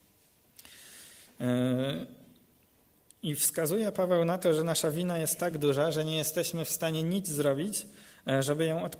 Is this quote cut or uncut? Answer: uncut